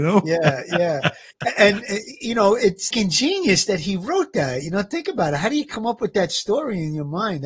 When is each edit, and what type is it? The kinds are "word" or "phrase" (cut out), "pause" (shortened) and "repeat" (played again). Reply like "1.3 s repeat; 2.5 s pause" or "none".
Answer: 2.9 s word